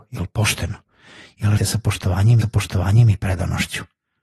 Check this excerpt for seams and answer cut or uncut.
cut